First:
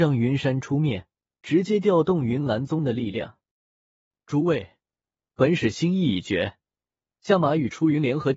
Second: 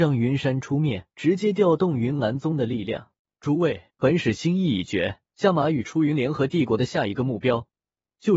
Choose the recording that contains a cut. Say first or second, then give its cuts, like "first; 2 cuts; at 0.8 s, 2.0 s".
second; 4 cuts; at 1.1 s, 3.2 s, 3.9 s, 5.2 s